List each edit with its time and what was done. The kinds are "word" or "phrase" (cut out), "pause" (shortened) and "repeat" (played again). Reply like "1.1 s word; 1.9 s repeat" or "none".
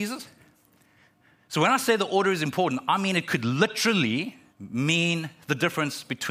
4.5 s pause